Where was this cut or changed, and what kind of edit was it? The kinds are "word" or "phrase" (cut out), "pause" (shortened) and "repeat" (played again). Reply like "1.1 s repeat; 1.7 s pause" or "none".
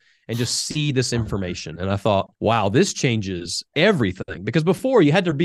2.4 s pause; 3.7 s pause